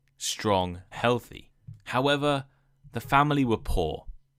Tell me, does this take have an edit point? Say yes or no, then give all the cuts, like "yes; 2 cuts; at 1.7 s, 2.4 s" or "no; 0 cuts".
yes; 1 cut; at 0.9 s